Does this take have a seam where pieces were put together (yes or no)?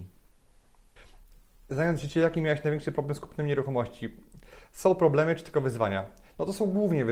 no